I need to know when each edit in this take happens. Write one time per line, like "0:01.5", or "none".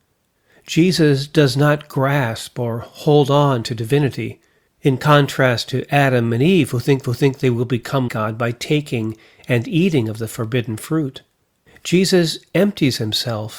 0:04.7
0:07.0
0:08.1
0:11.4